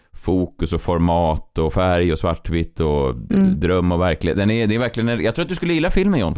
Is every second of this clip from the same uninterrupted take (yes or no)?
yes